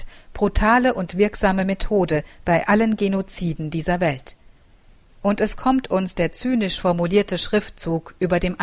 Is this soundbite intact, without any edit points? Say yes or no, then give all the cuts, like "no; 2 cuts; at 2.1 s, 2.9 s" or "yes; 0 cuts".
yes; 0 cuts